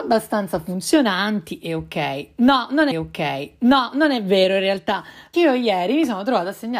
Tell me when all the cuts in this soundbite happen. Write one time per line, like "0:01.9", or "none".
0:02.9
0:05.3

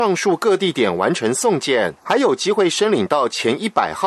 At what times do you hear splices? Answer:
0:02.0

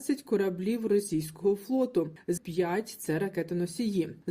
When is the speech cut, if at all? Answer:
0:02.4

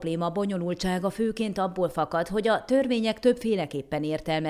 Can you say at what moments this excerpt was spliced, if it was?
none

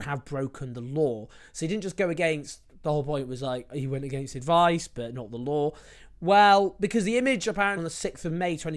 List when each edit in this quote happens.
0:07.8

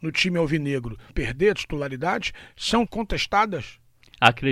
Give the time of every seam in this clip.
0:01.1
0:02.9

